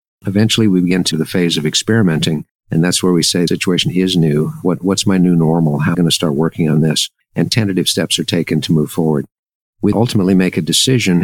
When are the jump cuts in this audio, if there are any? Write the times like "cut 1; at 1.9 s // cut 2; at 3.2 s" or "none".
cut 1; at 1.1 s // cut 2; at 2.5 s // cut 3; at 3.5 s // cut 4; at 5.9 s // cut 5; at 9.9 s

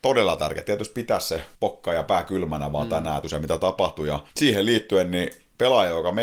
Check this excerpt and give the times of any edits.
cut 1; at 1.5 s // cut 2; at 3.2 s // cut 3; at 4.3 s

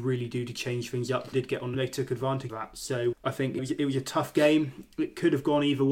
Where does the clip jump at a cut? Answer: cut 1; at 1.3 s // cut 2; at 1.7 s // cut 3; at 2.5 s // cut 4; at 3.1 s // cut 5; at 3.6 s

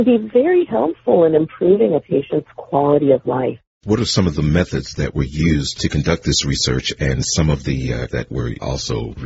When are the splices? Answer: cut 1; at 3.7 s // cut 2; at 8.1 s

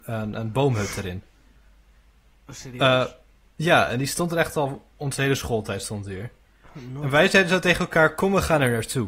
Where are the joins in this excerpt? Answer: cut 1; at 4.9 s

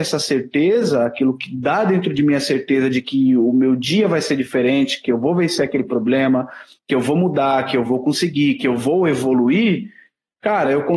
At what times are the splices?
none

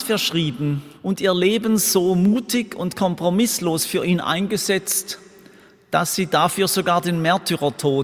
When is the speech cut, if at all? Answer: cut 1; at 1.0 s

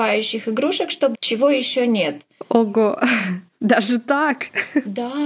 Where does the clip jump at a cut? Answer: cut 1; at 1.1 s

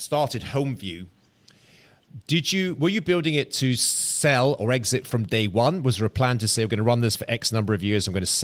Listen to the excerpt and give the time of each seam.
none

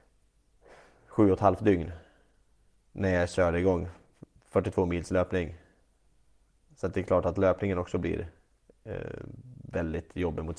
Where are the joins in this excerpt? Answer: none

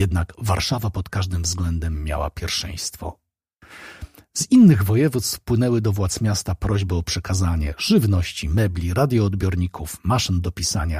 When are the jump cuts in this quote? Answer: none

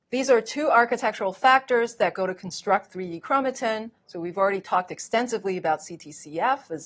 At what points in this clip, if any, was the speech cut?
cut 1; at 4.0 s

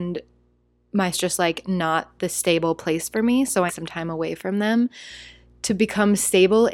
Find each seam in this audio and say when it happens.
cut 1; at 1.1 s // cut 2; at 3.7 s

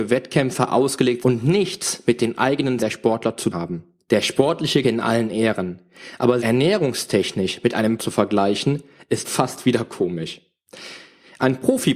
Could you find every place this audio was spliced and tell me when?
cut 1; at 1.2 s // cut 2; at 2.8 s // cut 3; at 3.5 s // cut 4; at 4.8 s // cut 5; at 6.4 s // cut 6; at 8.0 s // cut 7; at 9.2 s

